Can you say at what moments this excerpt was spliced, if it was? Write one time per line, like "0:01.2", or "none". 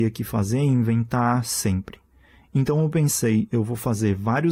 none